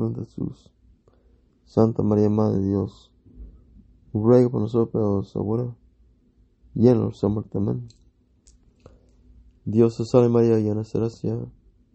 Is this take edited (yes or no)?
no